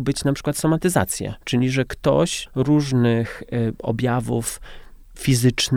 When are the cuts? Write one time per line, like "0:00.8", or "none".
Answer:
0:01.4
0:02.5

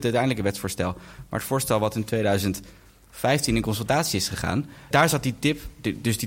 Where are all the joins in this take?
0:04.9

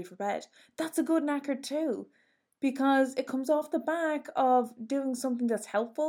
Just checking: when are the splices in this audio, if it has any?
none

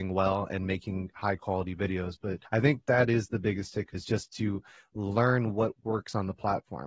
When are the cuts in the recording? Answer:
0:02.5
0:03.9

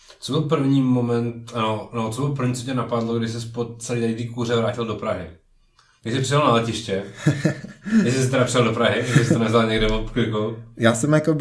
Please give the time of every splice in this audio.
none

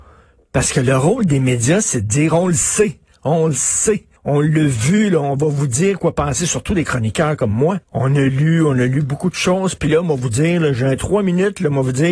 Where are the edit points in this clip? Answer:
0:04.2
0:07.8

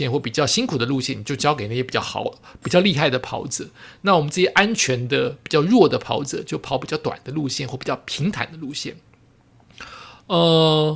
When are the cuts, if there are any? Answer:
none

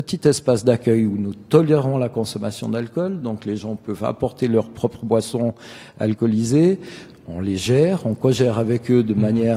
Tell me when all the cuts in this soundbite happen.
none

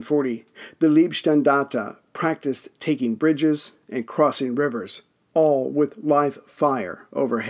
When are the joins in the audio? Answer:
none

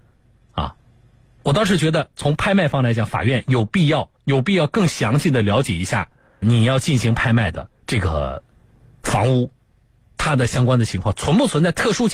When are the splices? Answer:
0:04.2
0:06.4
0:07.8

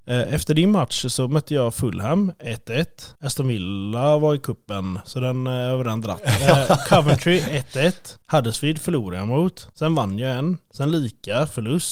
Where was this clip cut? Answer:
0:03.2
0:08.2
0:09.7

